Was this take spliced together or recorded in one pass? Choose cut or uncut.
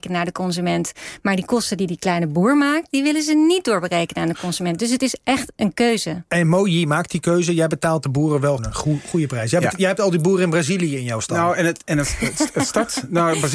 cut